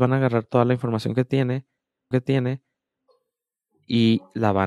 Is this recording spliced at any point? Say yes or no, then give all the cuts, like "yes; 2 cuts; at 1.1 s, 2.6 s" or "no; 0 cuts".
yes; 1 cut; at 2.1 s